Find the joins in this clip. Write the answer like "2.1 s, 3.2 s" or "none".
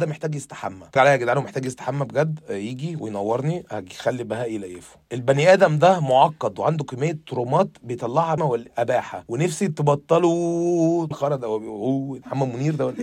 1.0 s, 8.4 s, 11.1 s

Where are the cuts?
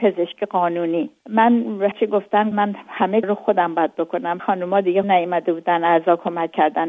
1.9 s, 2.5 s, 3.2 s, 4.4 s, 5.0 s

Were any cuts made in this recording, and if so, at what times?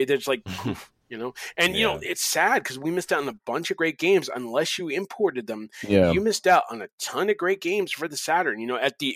none

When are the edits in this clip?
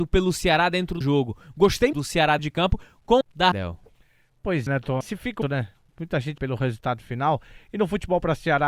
1.0 s, 1.9 s, 2.4 s, 3.2 s, 3.5 s, 4.7 s, 5.0 s, 5.4 s, 6.4 s

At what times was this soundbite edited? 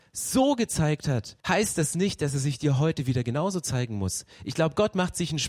1.4 s

